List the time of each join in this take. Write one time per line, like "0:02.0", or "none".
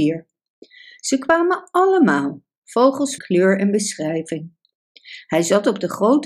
0:03.2